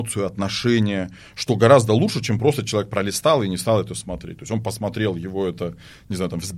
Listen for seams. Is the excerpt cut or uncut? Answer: uncut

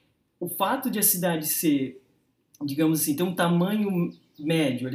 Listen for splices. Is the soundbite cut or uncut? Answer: uncut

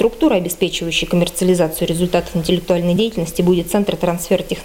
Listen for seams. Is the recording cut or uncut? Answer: uncut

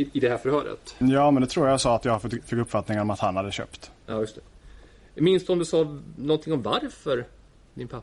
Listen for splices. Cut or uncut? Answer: uncut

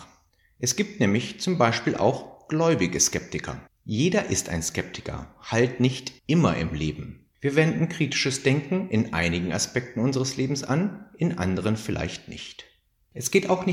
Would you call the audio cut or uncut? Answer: cut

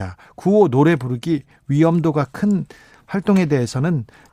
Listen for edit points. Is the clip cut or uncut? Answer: uncut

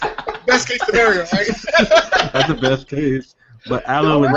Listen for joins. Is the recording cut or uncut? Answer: uncut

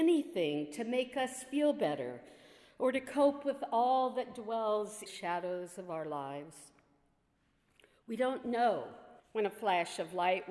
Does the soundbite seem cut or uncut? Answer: cut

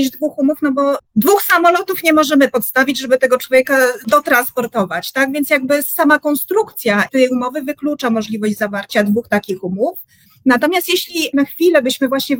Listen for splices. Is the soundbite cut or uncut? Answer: uncut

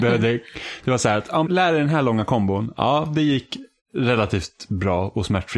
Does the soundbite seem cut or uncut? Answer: cut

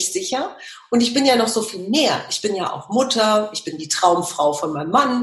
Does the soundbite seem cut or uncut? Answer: uncut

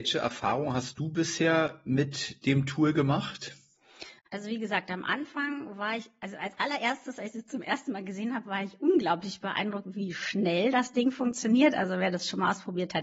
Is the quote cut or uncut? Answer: uncut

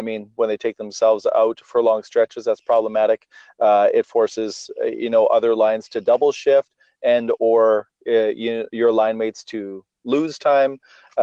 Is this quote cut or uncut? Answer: uncut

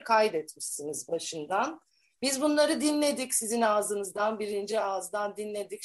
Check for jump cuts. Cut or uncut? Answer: uncut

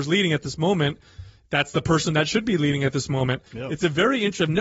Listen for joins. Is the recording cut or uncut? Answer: cut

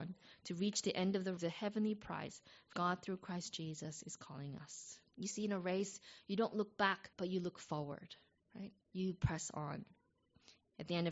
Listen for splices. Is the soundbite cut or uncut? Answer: cut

